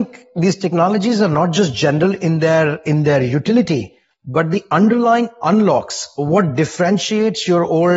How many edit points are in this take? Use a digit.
0